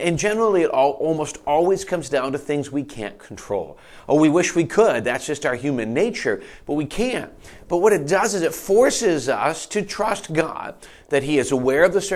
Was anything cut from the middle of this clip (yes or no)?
no